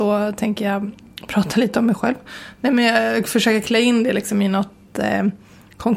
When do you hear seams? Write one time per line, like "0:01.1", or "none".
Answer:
none